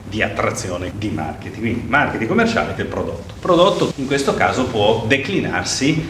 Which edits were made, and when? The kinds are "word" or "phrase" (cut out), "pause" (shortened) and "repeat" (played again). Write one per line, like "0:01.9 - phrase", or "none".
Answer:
0:00.9 - word
0:02.8 - word
0:03.9 - word

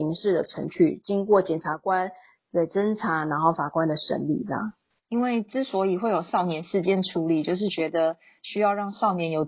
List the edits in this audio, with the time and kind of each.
none

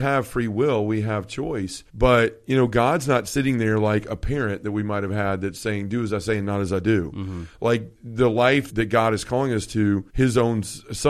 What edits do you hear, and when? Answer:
0:01.9 - pause
0:07.9 - pause
0:08.7 - word
0:10.1 - pause

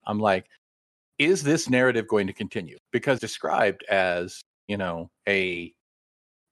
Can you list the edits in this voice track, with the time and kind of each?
0:03.2 - word
0:05.2 - pause

